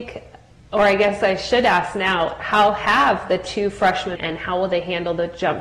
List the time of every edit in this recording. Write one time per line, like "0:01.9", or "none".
0:04.2